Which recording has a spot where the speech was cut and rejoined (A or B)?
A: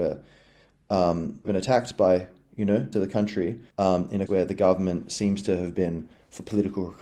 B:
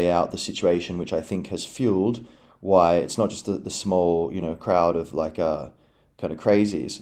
A